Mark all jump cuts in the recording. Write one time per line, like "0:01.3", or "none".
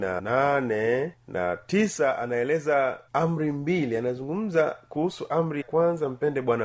0:01.2
0:03.1
0:05.6